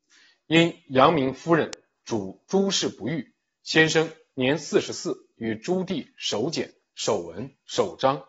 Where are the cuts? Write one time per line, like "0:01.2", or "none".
none